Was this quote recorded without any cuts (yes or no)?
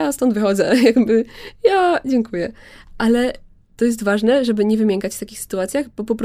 yes